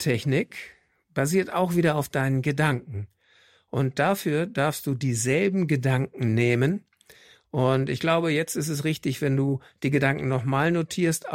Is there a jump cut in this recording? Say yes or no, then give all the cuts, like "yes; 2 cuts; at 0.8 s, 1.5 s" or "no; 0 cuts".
no; 0 cuts